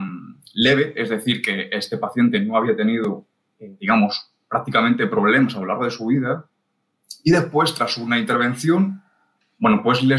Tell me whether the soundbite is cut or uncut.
uncut